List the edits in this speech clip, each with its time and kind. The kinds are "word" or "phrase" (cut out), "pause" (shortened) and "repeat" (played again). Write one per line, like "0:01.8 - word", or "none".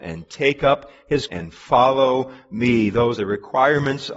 0:01.3 - word
0:03.2 - word

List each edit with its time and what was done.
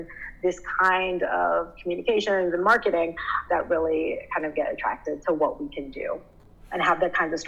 0:03.5 - word
0:05.2 - word

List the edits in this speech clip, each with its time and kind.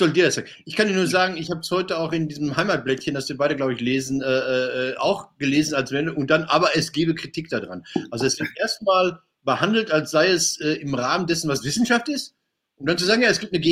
none

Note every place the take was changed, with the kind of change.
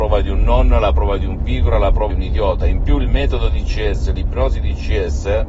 0:02.1 - word

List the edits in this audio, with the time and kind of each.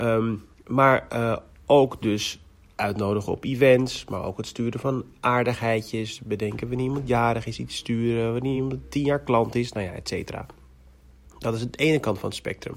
none

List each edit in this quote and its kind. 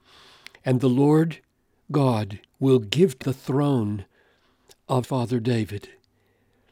0:02.5 - pause
0:03.2 - word
0:05.0 - word

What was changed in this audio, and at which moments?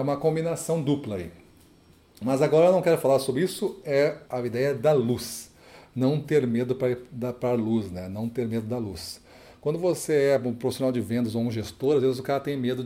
0:04.2 - pause

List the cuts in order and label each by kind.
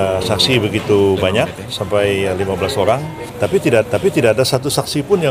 0:03.8 - repeat

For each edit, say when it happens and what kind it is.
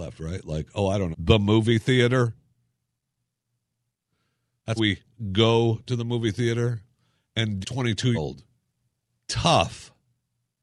0:01.1 - word
0:04.8 - word
0:07.6 - word
0:08.1 - word

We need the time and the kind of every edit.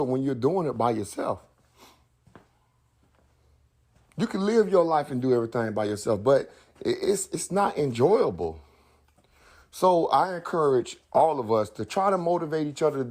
none

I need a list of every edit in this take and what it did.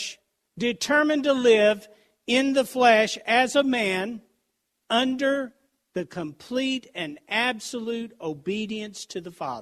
none

